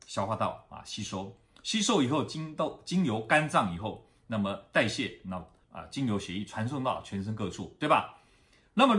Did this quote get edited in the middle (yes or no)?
no